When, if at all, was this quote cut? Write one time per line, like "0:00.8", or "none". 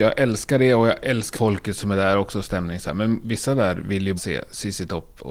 0:01.3
0:04.2